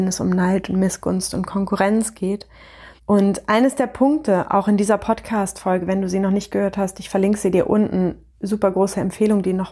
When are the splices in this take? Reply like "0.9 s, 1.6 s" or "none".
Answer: 3.0 s, 8.3 s

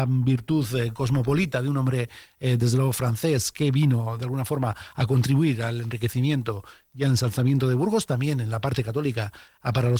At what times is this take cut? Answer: none

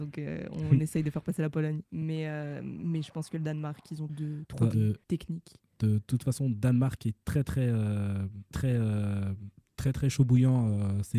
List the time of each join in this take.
1.8 s, 4.1 s, 4.7 s, 5.0 s, 8.5 s

